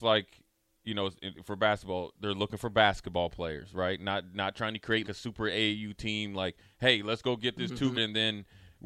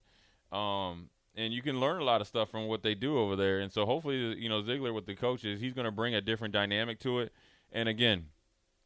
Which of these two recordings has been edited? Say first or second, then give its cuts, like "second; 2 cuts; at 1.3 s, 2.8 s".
first; 2 cuts; at 5.0 s, 7.9 s